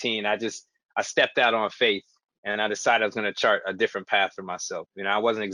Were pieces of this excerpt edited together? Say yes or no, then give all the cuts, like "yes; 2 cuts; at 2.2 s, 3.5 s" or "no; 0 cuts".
no; 0 cuts